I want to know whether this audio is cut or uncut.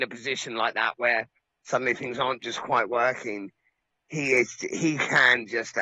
uncut